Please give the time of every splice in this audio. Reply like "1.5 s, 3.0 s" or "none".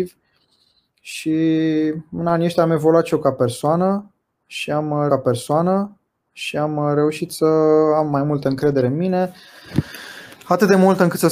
5.1 s